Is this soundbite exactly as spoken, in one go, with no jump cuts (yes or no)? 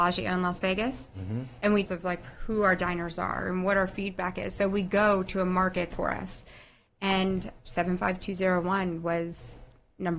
no